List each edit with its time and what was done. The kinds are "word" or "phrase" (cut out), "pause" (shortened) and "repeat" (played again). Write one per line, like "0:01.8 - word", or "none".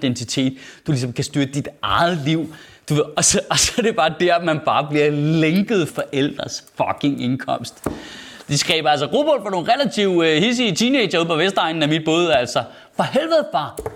0:05.9 - phrase